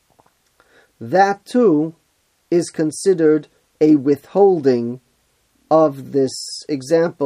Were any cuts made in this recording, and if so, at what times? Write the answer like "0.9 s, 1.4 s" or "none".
none